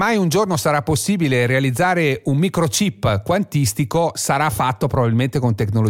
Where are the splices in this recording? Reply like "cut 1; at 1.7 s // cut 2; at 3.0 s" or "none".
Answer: none

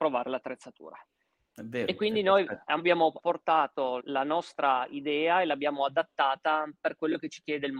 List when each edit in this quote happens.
cut 1; at 3.2 s // cut 2; at 4.0 s

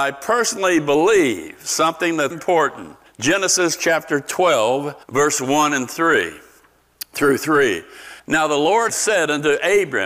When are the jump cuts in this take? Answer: cut 1; at 2.3 s // cut 2; at 3.1 s // cut 3; at 5.0 s // cut 4; at 8.2 s // cut 5; at 8.9 s

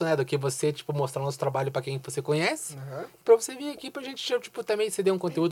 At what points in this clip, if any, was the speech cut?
none

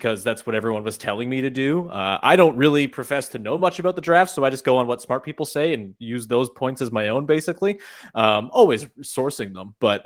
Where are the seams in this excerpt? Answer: none

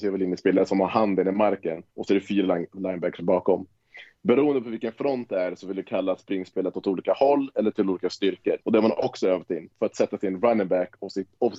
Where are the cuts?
cut 1; at 1.9 s // cut 2; at 8.6 s // cut 3; at 9.7 s

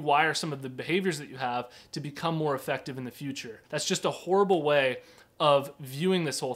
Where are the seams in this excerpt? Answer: cut 1; at 3.7 s

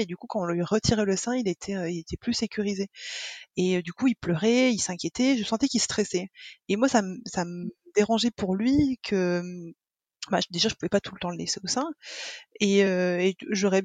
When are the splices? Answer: none

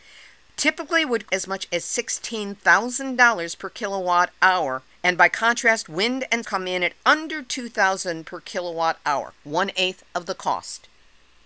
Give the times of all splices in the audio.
cut 1; at 1.3 s // cut 2; at 4.9 s // cut 3; at 6.4 s // cut 4; at 9.4 s

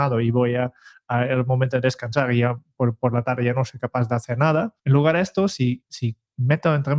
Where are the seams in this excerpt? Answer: cut 1; at 4.8 s // cut 2; at 5.8 s

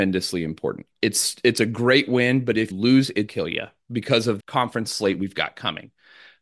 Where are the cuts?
cut 1; at 2.7 s // cut 2; at 3.3 s // cut 3; at 4.4 s

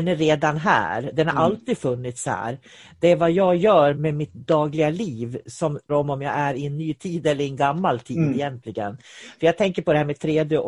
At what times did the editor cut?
cut 1; at 3.9 s // cut 2; at 5.4 s // cut 3; at 5.9 s

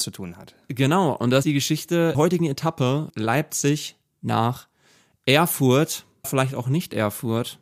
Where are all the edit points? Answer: cut 1; at 1.4 s // cut 2; at 2.1 s // cut 3; at 3.1 s // cut 4; at 6.2 s

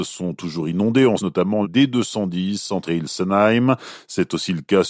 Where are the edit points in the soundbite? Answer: cut 1; at 1.2 s // cut 2; at 1.6 s // cut 3; at 2.9 s

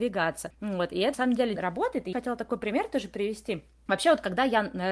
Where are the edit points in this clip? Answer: cut 1; at 1.1 s // cut 2; at 1.6 s // cut 3; at 2.1 s

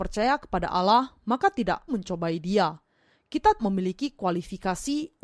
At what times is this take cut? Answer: cut 1; at 1.9 s // cut 2; at 3.6 s

